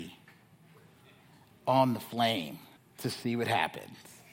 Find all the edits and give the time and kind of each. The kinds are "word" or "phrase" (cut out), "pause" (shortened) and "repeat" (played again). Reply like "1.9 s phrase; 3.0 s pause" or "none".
2.8 s pause